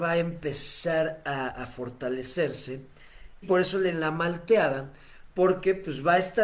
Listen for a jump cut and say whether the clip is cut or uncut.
cut